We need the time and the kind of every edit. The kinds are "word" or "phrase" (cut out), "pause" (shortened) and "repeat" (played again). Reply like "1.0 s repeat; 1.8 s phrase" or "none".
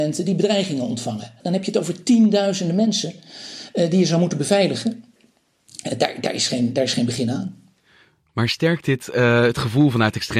none